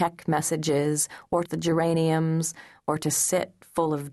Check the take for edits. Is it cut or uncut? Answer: cut